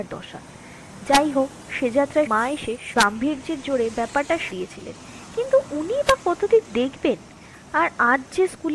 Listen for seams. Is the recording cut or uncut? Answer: cut